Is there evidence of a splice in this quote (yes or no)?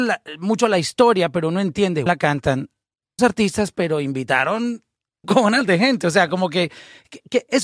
yes